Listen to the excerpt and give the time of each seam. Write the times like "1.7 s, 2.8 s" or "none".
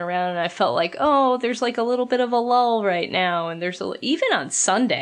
none